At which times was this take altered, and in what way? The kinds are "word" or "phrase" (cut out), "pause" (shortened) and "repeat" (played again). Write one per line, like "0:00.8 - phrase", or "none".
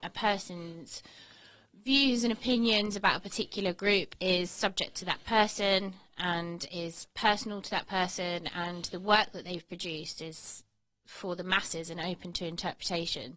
none